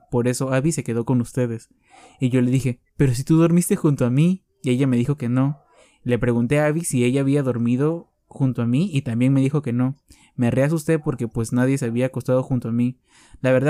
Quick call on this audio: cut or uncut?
uncut